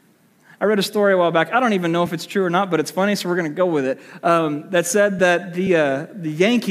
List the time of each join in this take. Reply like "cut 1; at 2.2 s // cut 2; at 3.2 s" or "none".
none

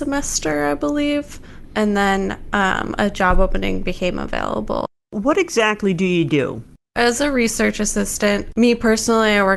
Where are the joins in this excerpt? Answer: none

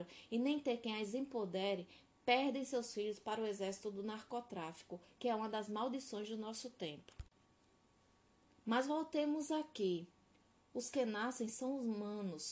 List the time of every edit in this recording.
none

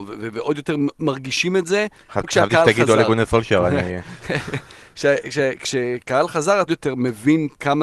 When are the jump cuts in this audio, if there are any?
cut 1; at 2.2 s // cut 2; at 6.0 s // cut 3; at 6.7 s

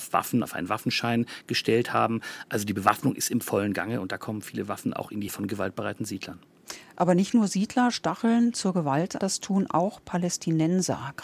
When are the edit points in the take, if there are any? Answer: cut 1; at 5.3 s // cut 2; at 9.2 s

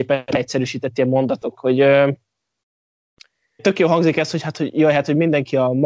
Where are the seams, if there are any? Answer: cut 1; at 1.6 s // cut 2; at 3.6 s

